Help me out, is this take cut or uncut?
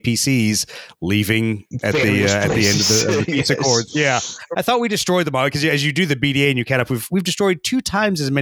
cut